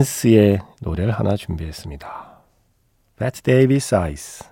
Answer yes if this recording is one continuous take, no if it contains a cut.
yes